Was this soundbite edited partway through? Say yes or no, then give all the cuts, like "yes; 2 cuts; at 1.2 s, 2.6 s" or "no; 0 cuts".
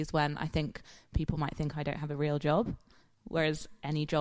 no; 0 cuts